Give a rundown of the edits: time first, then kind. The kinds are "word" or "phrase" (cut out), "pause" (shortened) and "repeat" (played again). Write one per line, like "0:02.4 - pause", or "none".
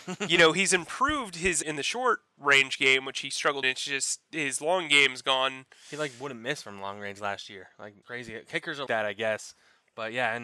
0:01.6 - phrase
0:03.6 - phrase
0:08.0 - word
0:08.9 - word